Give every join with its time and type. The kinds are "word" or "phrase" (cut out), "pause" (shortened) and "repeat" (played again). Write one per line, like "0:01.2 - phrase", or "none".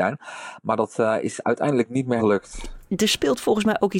0:02.2 - word

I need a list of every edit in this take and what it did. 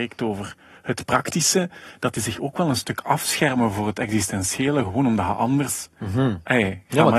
none

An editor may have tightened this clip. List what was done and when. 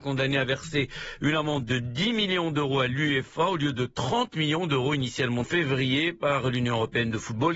0:05.4 - phrase

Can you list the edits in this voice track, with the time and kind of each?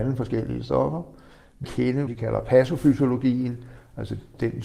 0:01.6 - phrase
0:02.1 - phrase

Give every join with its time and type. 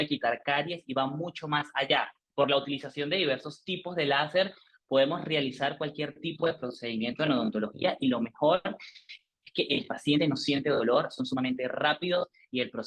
none

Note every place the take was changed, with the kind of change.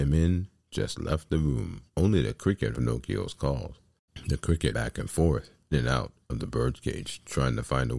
0:01.9 - pause
0:02.7 - word
0:04.7 - word
0:05.7 - word

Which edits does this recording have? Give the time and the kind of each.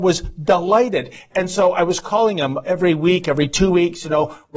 none

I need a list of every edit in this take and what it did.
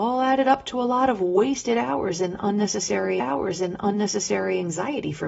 0:03.2 - repeat

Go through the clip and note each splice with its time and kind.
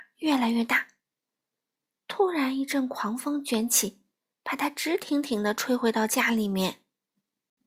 none

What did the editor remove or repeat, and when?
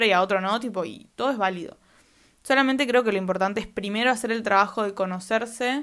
none

